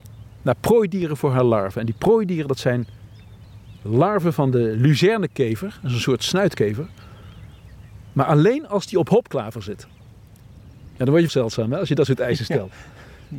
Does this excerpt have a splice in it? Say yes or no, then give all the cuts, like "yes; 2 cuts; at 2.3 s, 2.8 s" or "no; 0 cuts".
yes; 1 cut; at 11.3 s